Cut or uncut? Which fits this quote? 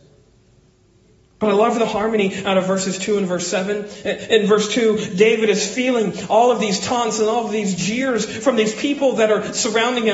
uncut